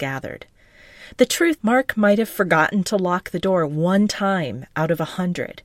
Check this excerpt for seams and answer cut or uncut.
cut